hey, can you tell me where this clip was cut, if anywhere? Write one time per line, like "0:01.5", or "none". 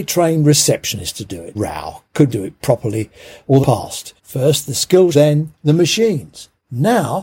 0:01.5
0:02.3
0:03.6
0:04.2
0:05.1
0:05.6